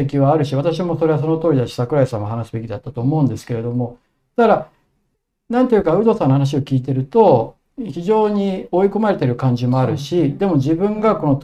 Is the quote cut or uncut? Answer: uncut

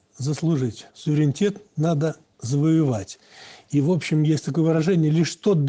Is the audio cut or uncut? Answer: cut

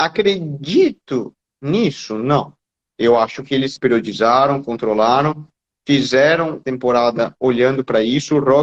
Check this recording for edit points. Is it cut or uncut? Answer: cut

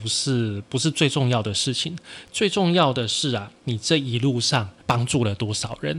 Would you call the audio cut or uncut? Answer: cut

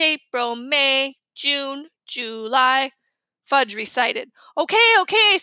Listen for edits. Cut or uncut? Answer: uncut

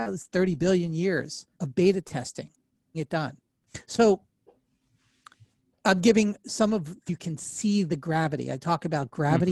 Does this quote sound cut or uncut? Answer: cut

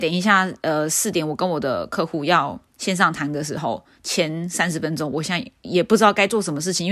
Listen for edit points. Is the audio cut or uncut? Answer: cut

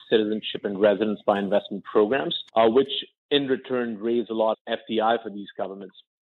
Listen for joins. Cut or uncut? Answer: cut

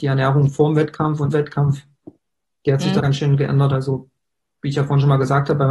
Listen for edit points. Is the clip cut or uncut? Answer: cut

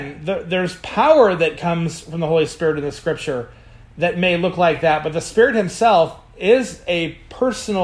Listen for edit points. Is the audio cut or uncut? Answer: uncut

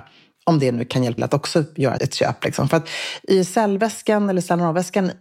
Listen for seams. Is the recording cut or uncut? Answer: cut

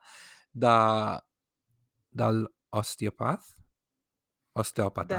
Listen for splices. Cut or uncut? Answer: uncut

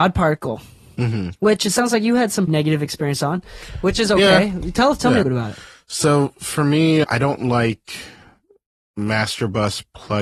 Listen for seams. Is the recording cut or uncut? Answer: cut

